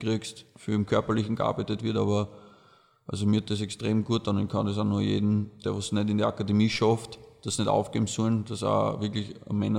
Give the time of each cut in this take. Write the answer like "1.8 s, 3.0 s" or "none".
none